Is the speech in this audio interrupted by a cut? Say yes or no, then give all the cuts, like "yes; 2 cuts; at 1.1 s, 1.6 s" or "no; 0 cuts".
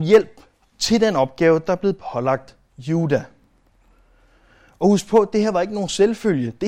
no; 0 cuts